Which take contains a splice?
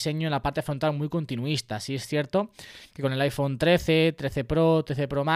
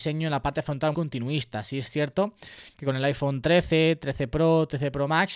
second; 1 cut; at 0.9 s

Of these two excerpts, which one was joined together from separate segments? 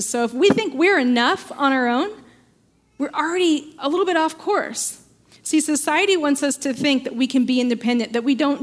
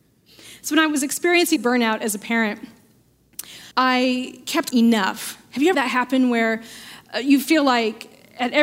second; 4 cuts; at 1.6 s, 3.7 s, 4.7 s, 5.7 s

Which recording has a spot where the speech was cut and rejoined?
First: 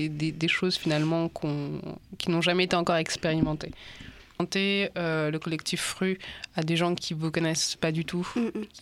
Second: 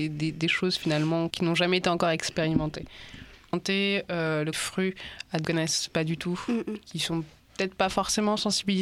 second; 3 cuts; at 1.3 s, 4.5 s, 5.4 s

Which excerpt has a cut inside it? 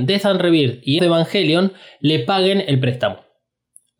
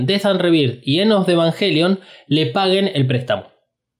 first; 1 cut; at 1.0 s

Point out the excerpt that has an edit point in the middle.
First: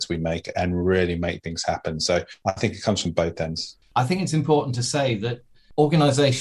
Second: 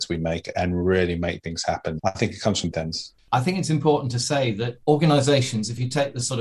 second; 3 cuts; at 2.0 s, 2.7 s, 4.8 s

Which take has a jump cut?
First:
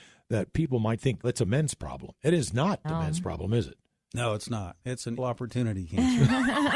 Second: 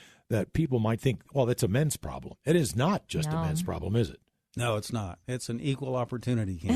first; 3 cuts; at 1.2 s, 2.8 s, 5.2 s

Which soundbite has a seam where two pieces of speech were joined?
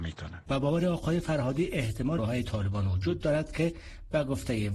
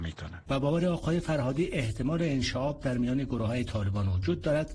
first; 1 cut; at 2.2 s

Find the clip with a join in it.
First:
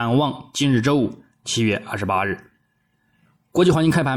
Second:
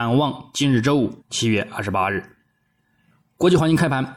second; 1 cut; at 1.2 s

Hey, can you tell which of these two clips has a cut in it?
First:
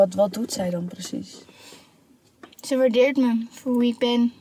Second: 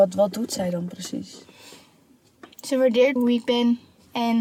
second; 1 cut; at 3.2 s

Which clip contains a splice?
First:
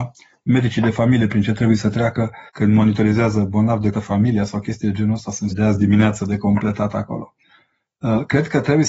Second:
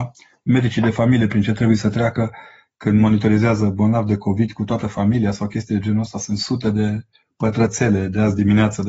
first; 3 cuts; at 2.5 s, 3.9 s, 5.5 s

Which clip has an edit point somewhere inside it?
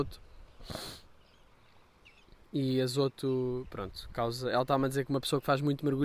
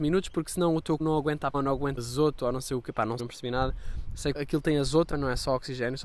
second; 6 cuts; at 1.0 s, 1.5 s, 2.0 s, 3.2 s, 4.3 s, 5.1 s

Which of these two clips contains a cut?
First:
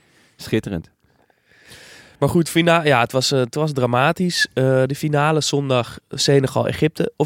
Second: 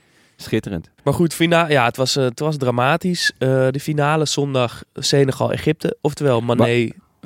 second; 1 cut; at 1.0 s

